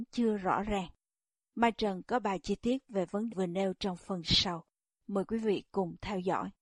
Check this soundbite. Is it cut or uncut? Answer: cut